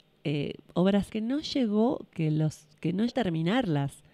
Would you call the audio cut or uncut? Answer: cut